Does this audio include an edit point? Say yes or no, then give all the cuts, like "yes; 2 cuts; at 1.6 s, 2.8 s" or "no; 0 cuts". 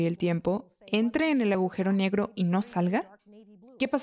no; 0 cuts